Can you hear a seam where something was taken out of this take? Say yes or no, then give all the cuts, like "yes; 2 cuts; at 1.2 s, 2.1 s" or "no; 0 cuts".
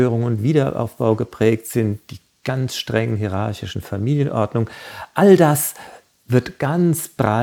no; 0 cuts